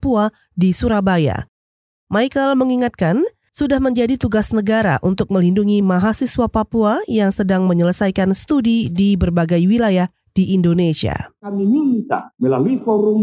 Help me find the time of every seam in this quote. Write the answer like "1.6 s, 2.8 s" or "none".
none